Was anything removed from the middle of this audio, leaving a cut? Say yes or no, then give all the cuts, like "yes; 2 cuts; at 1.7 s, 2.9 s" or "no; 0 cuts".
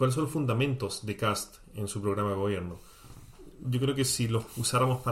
no; 0 cuts